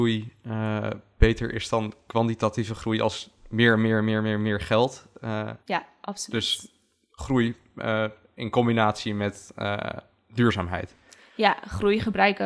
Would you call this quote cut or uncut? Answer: cut